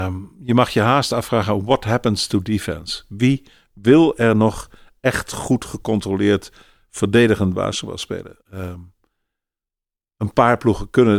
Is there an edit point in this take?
yes; 1 cut; at 8.4 s

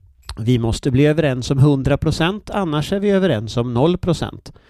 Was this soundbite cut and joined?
no; 0 cuts

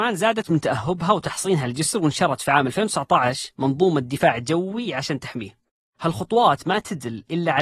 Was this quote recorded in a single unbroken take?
yes; 0 cuts

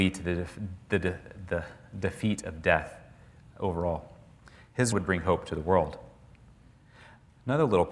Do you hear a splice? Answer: yes; 1 cut; at 4.9 s

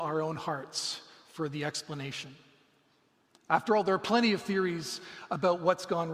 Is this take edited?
no; 0 cuts

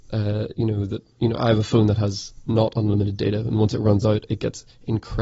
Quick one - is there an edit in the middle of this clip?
yes; 1 cut; at 1.1 s

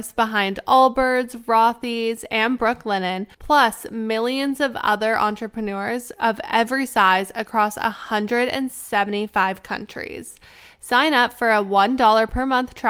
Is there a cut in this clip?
yes; 1 cut; at 3.3 s

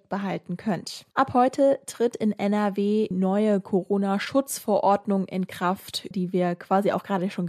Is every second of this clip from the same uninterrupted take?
no; 3 cuts; at 1.1 s, 3.1 s, 6.1 s

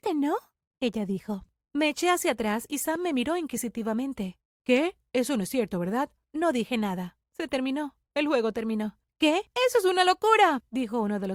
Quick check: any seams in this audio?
no; 0 cuts

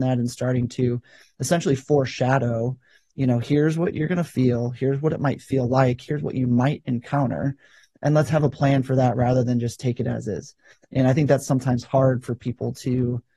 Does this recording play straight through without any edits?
yes; 0 cuts

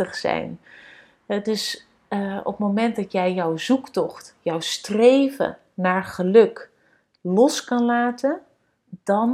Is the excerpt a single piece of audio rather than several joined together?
yes; 0 cuts

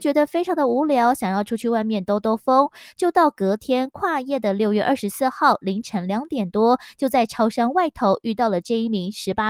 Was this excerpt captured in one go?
yes; 0 cuts

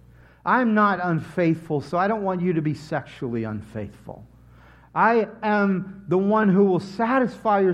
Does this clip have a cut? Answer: no; 0 cuts

